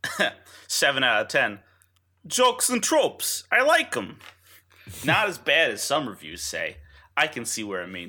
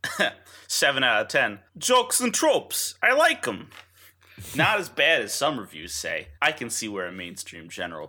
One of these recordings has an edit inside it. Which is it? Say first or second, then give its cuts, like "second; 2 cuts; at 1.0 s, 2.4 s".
second; 2 cuts; at 1.7 s, 6.4 s